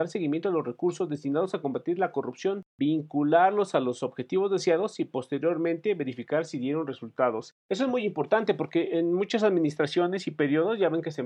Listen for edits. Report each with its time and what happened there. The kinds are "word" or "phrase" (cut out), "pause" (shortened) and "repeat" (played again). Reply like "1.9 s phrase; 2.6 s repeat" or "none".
2.7 s pause